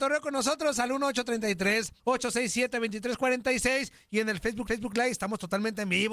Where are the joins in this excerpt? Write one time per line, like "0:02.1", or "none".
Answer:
0:02.0
0:04.7